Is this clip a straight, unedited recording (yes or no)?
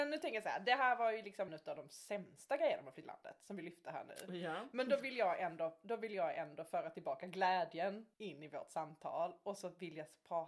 no